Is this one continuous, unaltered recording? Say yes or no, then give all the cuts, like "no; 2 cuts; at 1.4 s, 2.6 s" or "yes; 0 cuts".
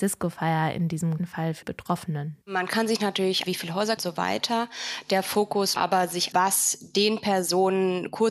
no; 7 cuts; at 1.2 s, 1.6 s, 2.4 s, 3.5 s, 4.0 s, 5.8 s, 6.3 s